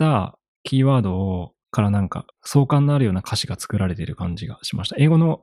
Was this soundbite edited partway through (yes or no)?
yes